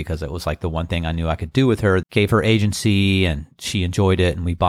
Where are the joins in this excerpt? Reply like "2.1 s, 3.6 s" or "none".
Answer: 2.0 s